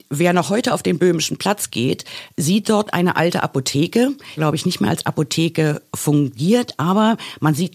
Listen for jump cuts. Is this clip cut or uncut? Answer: cut